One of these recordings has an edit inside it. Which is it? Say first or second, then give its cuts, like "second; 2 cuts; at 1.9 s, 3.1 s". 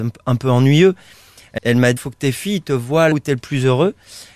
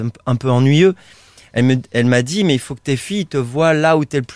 first; 3 cuts; at 1.6 s, 2.0 s, 3.1 s